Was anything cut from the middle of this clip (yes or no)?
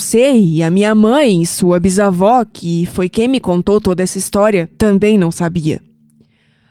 no